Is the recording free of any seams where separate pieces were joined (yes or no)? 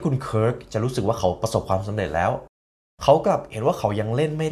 yes